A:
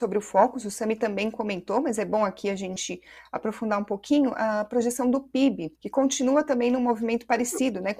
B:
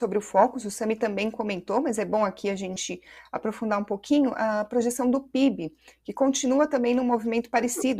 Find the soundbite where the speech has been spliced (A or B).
A